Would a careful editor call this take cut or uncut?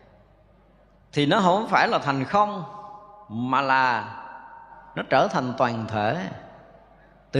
uncut